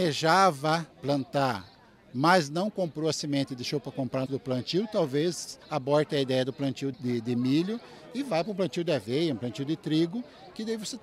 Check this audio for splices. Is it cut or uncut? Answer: cut